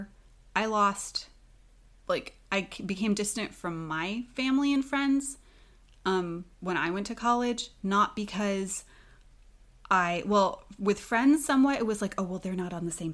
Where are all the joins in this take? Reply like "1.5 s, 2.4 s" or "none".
none